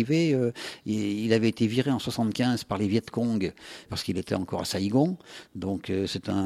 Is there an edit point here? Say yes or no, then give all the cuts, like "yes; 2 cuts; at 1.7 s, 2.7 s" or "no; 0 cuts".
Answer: yes; 1 cut; at 3.9 s